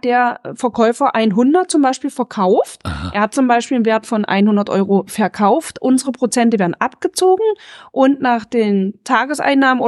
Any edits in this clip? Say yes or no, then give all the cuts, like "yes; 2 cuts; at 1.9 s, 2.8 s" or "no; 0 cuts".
no; 0 cuts